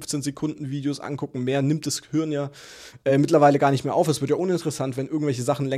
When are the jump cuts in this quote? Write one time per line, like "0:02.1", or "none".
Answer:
none